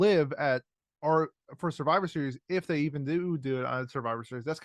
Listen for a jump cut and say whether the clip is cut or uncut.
uncut